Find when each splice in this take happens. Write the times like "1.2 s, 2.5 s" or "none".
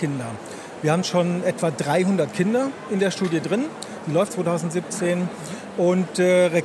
1.0 s, 4.3 s